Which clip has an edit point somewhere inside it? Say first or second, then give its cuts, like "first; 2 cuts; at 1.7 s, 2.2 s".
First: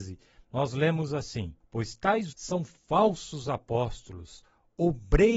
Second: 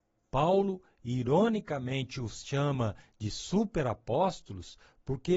first; 2 cuts; at 1.6 s, 2.3 s